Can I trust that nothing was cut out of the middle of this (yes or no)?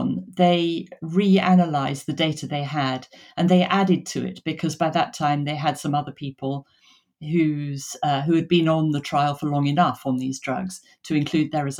yes